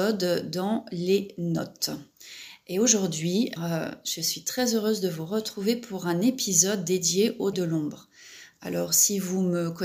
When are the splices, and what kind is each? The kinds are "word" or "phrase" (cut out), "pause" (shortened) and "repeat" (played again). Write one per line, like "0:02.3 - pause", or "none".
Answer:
0:03.6 - word
0:07.5 - word